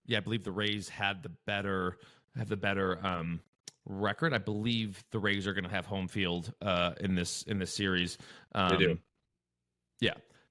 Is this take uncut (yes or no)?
yes